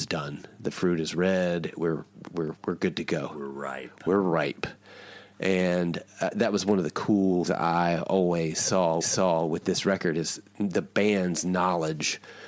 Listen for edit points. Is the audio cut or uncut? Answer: cut